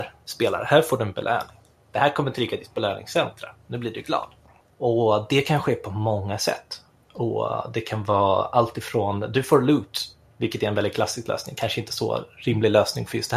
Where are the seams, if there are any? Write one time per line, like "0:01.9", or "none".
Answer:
none